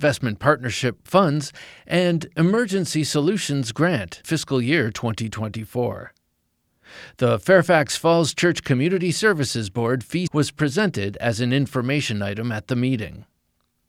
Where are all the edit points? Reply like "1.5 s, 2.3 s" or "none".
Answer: 1.1 s, 4.2 s, 10.3 s